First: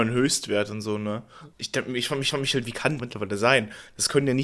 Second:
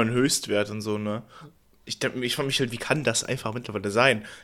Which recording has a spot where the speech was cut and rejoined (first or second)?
first